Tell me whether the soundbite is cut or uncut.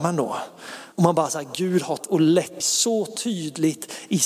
cut